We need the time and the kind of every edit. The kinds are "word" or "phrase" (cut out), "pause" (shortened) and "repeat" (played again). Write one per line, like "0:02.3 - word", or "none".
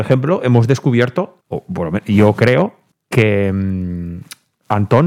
0:01.4 - pause
0:02.9 - pause